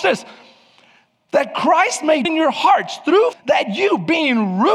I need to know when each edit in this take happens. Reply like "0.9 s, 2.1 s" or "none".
2.2 s, 3.3 s